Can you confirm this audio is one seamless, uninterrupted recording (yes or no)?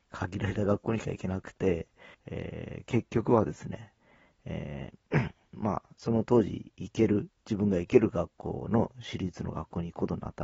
no